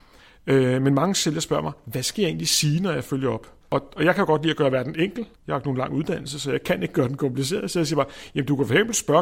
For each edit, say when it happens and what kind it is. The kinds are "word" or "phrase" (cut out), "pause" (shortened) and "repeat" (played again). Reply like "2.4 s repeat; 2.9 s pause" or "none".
3.6 s pause; 5.4 s pause